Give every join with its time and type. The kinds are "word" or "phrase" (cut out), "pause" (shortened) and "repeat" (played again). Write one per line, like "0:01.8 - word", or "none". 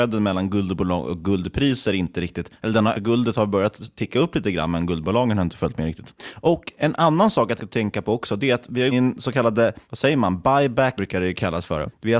0:02.9 - word
0:07.6 - phrase
0:08.9 - phrase
0:11.0 - word